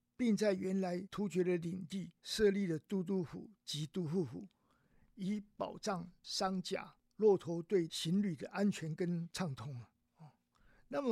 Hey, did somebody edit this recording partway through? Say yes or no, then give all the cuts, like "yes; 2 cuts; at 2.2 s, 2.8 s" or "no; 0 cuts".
yes; 1 cut; at 3.6 s